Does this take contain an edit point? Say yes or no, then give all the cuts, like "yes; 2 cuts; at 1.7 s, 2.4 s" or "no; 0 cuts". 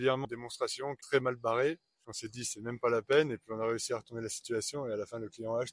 yes; 1 cut; at 1.0 s